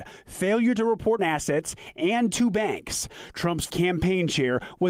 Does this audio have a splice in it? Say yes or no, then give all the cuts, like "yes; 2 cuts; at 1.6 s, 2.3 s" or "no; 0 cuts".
yes; 3 cuts; at 1.2 s, 2.3 s, 3.7 s